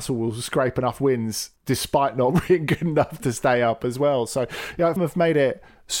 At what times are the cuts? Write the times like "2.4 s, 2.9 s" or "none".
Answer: 1.6 s, 2.5 s, 5.0 s